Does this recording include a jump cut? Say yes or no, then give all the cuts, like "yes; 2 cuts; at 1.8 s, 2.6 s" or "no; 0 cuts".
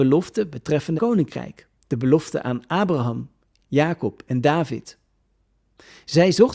yes; 3 cuts; at 1.0 s, 1.7 s, 3.6 s